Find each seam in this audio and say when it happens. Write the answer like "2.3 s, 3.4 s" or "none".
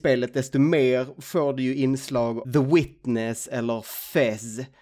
2.4 s